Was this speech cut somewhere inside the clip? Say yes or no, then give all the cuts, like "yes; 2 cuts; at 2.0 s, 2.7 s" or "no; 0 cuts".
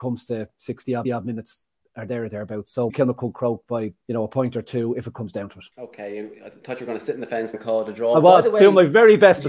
yes; 5 cuts; at 1.0 s, 2.9 s, 4.0 s, 5.7 s, 7.5 s